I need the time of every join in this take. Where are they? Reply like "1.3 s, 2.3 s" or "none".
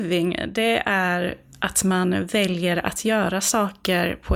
none